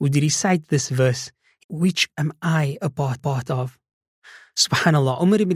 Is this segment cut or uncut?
cut